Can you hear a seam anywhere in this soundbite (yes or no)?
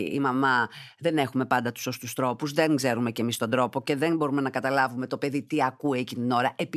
no